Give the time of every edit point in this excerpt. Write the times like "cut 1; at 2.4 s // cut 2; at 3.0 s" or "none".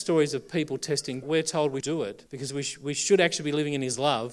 cut 1; at 1.2 s // cut 2; at 1.8 s // cut 3; at 2.3 s